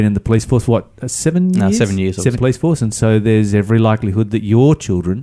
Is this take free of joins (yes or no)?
no